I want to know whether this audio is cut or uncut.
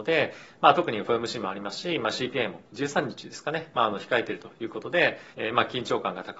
cut